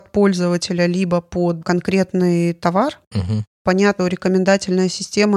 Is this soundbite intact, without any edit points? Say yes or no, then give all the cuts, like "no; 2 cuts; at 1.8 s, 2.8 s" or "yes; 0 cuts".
no; 2 cuts; at 1.6 s, 4.0 s